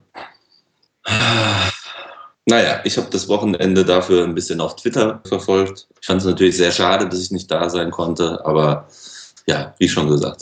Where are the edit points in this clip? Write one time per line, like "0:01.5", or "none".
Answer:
0:02.3
0:05.2
0:06.0